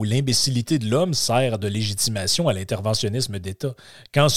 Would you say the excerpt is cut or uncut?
uncut